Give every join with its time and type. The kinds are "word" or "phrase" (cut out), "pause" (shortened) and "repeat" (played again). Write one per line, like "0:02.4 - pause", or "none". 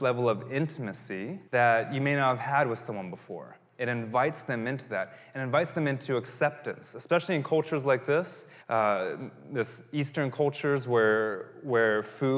0:01.5 - pause
0:08.6 - pause